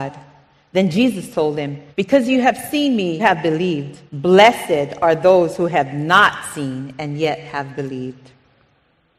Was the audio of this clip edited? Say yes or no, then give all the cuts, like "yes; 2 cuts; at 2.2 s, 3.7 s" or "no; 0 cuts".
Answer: yes; 3 cuts; at 1.9 s, 3.2 s, 4.1 s